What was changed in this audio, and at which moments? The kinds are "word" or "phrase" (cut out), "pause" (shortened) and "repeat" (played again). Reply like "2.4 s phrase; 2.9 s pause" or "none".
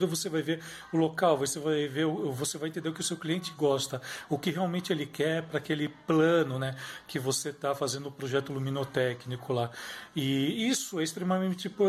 none